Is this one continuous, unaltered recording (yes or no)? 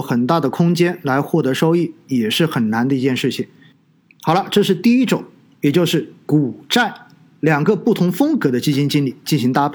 yes